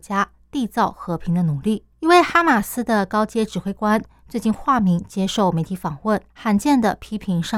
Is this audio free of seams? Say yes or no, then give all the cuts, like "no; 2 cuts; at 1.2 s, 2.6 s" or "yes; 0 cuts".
no; 2 cuts; at 1.9 s, 6.3 s